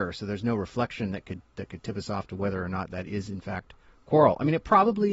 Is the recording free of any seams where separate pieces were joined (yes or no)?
yes